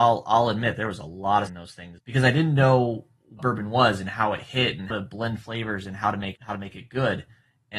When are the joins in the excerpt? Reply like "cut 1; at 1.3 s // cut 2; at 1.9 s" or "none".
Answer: cut 1; at 1.5 s // cut 2; at 2.0 s // cut 3; at 3.4 s // cut 4; at 4.9 s // cut 5; at 6.3 s